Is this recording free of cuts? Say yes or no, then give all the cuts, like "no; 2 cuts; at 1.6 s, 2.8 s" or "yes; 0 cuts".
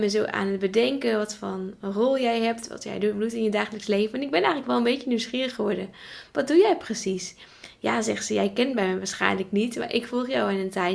yes; 0 cuts